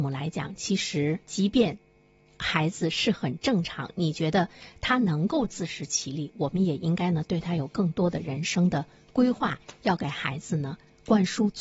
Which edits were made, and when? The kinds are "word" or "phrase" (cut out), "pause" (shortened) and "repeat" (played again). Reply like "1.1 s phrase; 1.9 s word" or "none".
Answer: 1.2 s pause